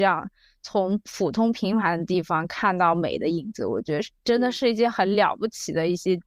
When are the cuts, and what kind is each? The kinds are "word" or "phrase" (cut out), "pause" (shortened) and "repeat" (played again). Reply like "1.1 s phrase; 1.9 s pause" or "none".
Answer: 4.2 s pause